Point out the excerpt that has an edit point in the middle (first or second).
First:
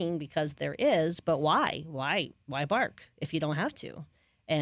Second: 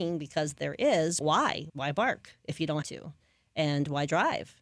second